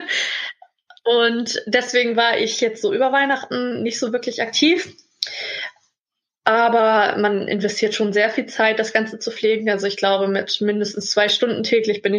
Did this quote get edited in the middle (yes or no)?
no